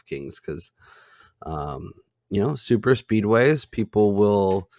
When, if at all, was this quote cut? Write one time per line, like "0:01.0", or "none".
none